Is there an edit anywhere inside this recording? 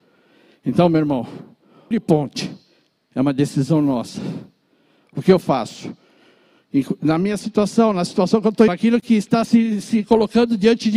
yes; 3 cuts; at 1.9 s, 8.7 s, 9.4 s

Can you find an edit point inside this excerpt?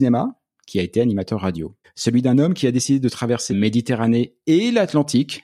yes; 2 cuts; at 1.8 s, 3.5 s

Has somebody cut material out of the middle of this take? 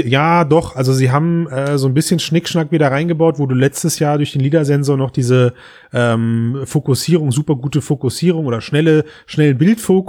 no; 0 cuts

